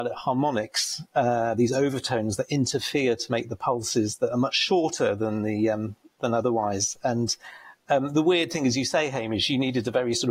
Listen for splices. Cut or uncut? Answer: uncut